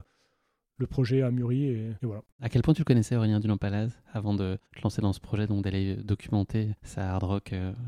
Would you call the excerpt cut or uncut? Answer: cut